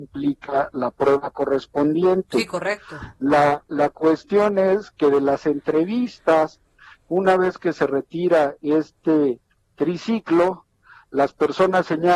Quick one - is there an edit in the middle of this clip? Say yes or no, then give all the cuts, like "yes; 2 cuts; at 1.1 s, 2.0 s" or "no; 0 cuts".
no; 0 cuts